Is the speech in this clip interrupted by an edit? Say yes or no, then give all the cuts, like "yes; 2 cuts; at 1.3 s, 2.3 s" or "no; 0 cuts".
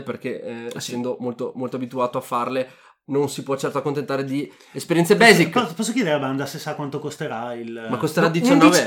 no; 0 cuts